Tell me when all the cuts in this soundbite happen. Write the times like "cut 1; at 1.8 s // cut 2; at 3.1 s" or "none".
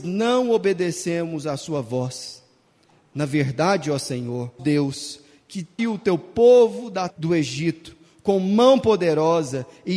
cut 1; at 4.6 s // cut 2; at 5.8 s // cut 3; at 7.1 s

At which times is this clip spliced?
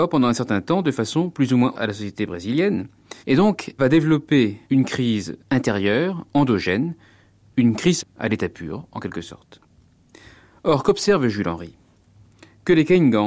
cut 1; at 1.7 s // cut 2; at 3.2 s // cut 3; at 3.8 s // cut 4; at 4.6 s // cut 5; at 5.4 s // cut 6; at 8.0 s

